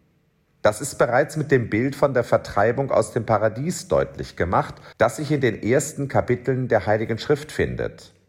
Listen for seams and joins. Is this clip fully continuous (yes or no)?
no